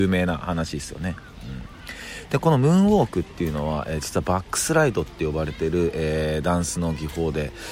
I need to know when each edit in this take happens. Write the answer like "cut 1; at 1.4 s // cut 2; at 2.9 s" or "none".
none